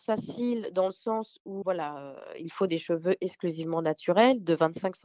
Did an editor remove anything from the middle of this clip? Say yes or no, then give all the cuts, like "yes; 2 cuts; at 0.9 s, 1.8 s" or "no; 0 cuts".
yes; 1 cut; at 1.6 s